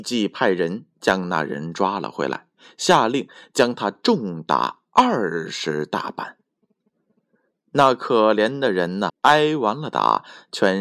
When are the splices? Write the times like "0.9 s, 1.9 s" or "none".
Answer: 9.1 s